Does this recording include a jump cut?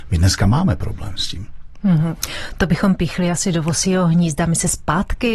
no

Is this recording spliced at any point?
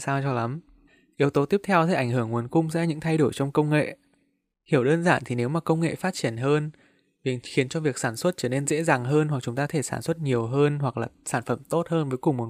no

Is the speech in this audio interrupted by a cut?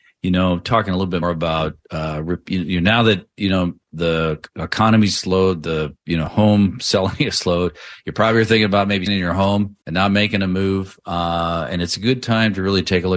yes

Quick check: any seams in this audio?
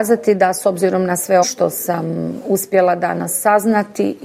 yes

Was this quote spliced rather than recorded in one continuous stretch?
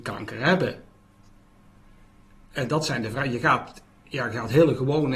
no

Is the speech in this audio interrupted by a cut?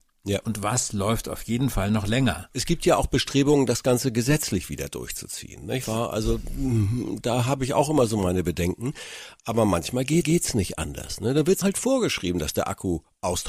yes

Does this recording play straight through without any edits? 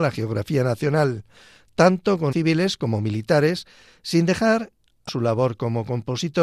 no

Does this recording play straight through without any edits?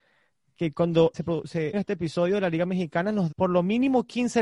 no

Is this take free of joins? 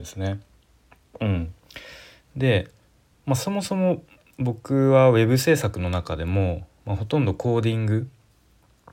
yes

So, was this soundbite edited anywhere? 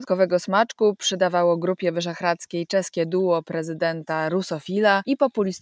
no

